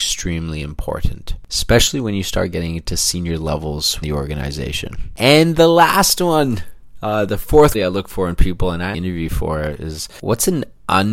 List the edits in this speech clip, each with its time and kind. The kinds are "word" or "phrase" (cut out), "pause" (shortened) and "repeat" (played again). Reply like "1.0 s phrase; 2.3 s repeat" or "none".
4.0 s word; 7.7 s word; 8.9 s word

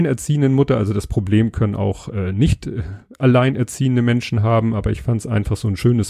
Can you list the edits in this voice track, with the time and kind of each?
none

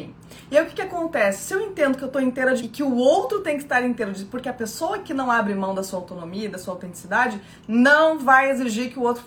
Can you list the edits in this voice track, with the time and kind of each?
2.6 s word

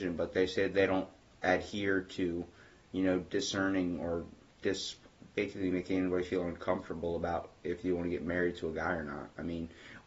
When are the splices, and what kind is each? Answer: none

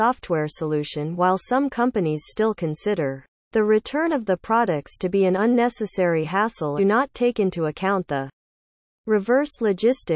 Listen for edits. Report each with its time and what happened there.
3.3 s pause; 6.8 s phrase

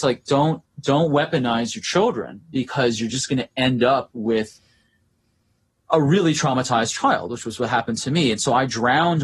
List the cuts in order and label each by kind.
none

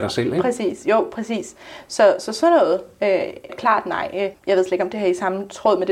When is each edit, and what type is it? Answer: 3.5 s word; 4.4 s pause

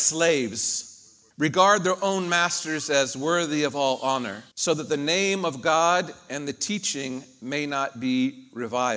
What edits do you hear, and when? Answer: 1.3 s pause; 4.5 s pause

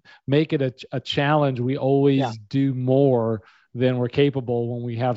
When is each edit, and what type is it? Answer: none

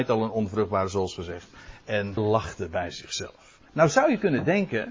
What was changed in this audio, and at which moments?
2.2 s phrase

